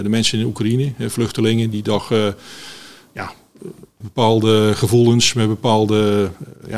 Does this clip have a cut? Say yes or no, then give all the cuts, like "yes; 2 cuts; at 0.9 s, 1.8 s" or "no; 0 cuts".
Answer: yes; 1 cut; at 4.0 s